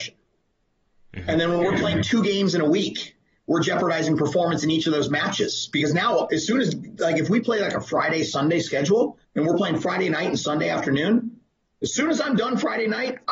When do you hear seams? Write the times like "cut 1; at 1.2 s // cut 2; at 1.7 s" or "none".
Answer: cut 1; at 9.2 s